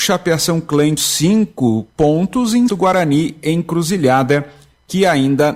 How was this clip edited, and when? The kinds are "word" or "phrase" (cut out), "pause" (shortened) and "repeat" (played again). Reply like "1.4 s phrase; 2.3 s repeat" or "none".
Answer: 1.0 s word; 2.7 s word